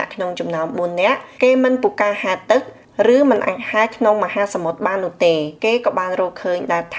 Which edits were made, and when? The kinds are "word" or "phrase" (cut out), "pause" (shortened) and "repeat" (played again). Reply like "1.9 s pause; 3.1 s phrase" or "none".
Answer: 5.6 s pause